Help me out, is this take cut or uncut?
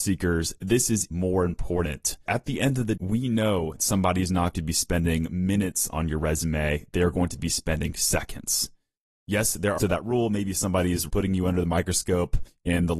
cut